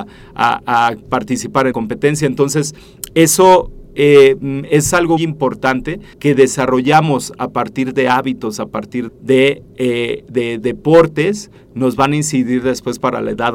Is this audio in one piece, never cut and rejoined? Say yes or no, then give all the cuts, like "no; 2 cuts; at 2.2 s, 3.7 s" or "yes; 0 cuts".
no; 4 cuts; at 1.7 s, 5.2 s, 6.1 s, 9.1 s